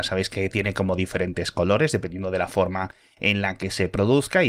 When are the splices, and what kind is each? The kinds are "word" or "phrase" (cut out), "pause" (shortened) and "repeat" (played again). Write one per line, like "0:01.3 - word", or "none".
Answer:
none